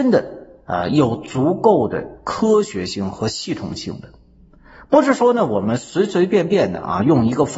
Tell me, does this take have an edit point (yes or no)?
no